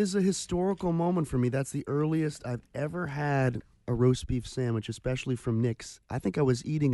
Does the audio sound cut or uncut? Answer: uncut